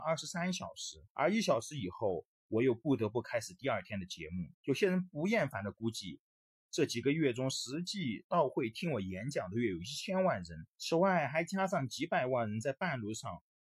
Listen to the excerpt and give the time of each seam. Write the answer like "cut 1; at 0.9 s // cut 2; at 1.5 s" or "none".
cut 1; at 1.1 s // cut 2; at 4.5 s // cut 3; at 10.7 s